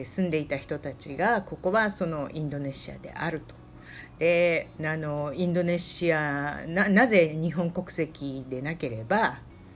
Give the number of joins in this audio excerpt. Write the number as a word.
one